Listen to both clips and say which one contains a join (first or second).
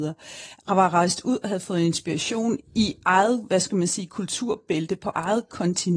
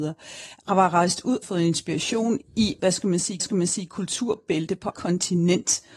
second